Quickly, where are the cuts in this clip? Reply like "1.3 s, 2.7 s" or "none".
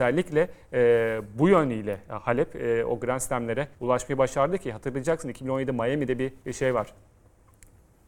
3.7 s, 6.4 s